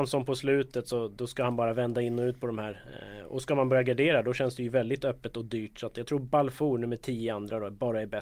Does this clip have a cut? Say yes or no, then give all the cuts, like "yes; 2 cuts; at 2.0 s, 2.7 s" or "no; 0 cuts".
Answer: no; 0 cuts